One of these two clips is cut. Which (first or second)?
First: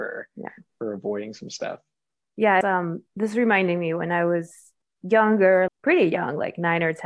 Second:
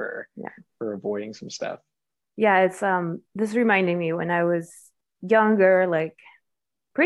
first